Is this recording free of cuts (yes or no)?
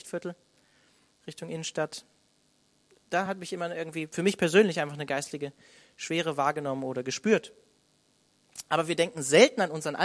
yes